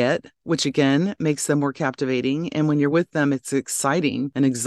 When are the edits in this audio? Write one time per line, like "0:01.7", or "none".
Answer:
none